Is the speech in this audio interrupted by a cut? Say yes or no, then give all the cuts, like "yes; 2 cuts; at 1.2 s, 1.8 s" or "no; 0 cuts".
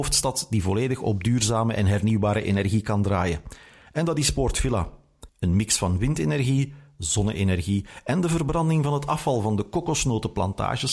yes; 1 cut; at 5.3 s